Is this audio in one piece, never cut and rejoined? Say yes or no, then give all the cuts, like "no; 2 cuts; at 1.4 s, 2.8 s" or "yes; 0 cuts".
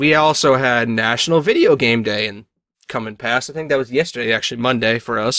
yes; 0 cuts